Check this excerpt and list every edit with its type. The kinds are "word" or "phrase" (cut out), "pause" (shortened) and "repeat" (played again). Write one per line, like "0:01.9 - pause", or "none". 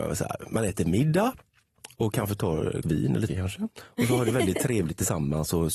0:02.8 - word
0:03.3 - phrase